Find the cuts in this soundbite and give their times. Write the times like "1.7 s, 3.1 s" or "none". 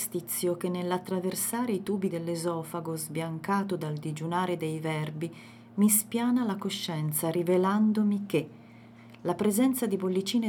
2.1 s